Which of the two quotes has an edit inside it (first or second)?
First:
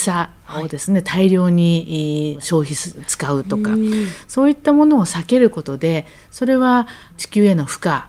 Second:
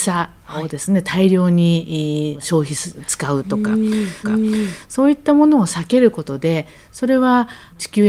second